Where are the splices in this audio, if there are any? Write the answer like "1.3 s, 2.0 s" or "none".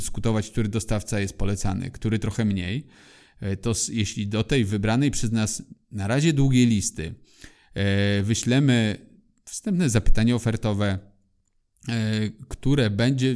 none